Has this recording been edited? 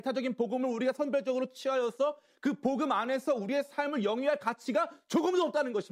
no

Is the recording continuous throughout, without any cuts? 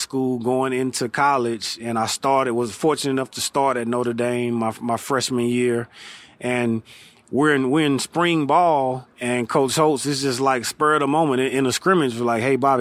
no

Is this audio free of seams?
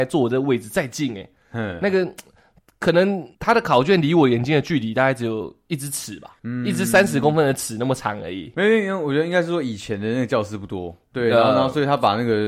no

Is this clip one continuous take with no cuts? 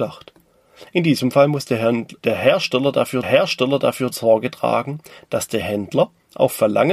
no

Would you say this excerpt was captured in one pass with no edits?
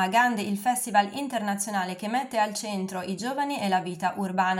yes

